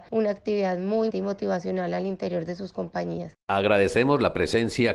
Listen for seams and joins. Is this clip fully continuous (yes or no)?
no